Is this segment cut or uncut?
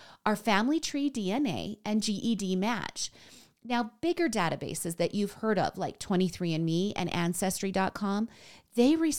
uncut